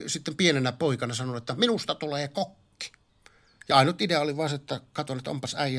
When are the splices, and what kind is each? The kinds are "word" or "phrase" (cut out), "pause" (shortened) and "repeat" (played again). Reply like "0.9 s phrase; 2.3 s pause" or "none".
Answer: none